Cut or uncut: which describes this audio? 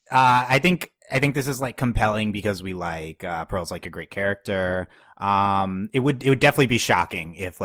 uncut